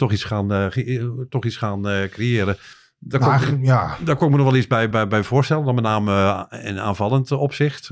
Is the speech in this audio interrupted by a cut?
yes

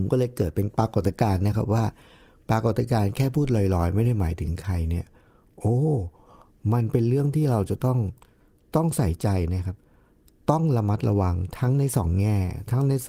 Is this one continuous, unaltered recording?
yes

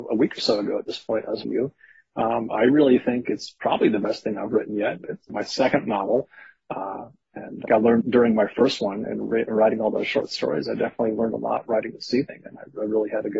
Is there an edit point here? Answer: yes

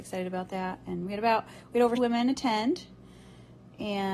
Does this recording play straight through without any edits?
no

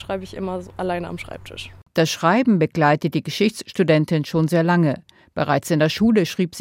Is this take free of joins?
yes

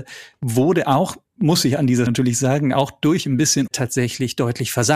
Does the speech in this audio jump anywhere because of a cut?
yes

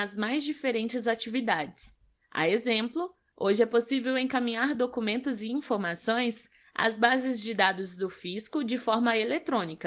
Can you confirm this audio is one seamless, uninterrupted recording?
yes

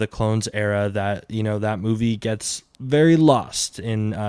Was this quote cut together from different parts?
yes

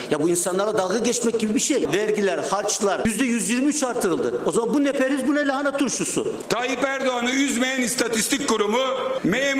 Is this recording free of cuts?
yes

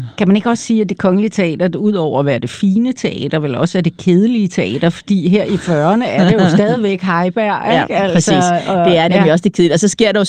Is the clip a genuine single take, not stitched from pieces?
yes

